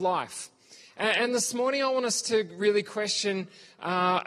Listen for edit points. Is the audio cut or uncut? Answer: uncut